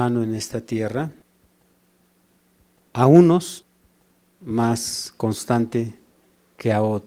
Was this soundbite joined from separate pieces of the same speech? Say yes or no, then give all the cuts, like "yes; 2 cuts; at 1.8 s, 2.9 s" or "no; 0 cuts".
no; 0 cuts